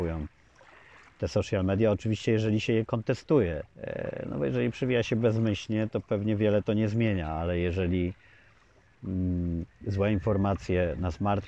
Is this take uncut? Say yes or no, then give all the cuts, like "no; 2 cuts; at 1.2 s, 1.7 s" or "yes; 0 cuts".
no; 1 cut; at 3.7 s